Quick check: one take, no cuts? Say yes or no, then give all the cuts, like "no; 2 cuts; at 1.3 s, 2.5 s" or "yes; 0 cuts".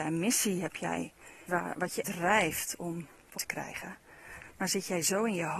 no; 3 cuts; at 1.5 s, 2.0 s, 3.4 s